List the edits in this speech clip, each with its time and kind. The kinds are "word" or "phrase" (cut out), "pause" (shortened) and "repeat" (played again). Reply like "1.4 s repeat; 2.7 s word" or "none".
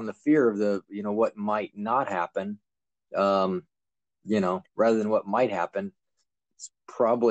none